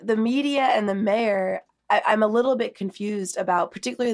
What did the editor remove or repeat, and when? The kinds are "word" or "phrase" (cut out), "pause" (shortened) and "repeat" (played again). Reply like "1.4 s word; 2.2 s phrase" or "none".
none